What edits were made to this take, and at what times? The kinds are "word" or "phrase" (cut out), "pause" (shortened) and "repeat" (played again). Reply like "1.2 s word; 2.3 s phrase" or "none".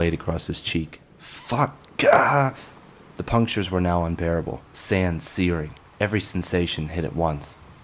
1.1 s pause; 2.8 s pause; 4.7 s pause; 5.9 s pause

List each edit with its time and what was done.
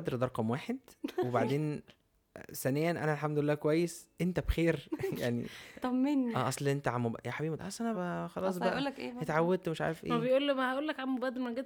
7.6 s phrase; 7.9 s word

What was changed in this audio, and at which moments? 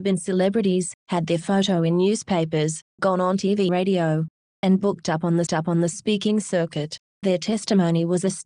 1.0 s pause; 2.9 s pause; 3.7 s word; 4.8 s word; 5.5 s repeat

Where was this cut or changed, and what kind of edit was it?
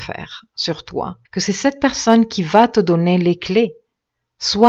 1.2 s pause

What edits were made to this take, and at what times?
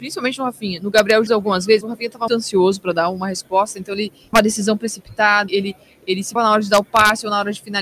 1.3 s word; 1.8 s word; 2.3 s word; 4.3 s word; 5.5 s word; 6.4 s word

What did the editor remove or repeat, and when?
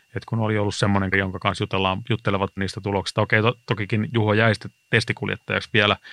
1.1 s word; 2.6 s word

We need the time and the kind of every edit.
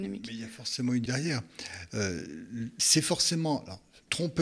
1.1 s word

